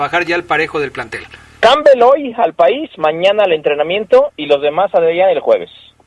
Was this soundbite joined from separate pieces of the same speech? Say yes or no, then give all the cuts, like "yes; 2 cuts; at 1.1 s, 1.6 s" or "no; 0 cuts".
no; 0 cuts